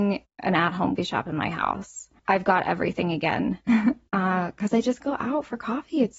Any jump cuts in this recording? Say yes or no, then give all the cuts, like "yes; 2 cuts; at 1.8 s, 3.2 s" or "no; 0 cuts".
yes; 5 cuts; at 1.0 s, 2.2 s, 3.6 s, 4.1 s, 5.0 s